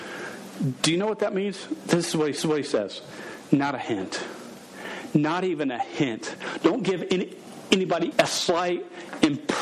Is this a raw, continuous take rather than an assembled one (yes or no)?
no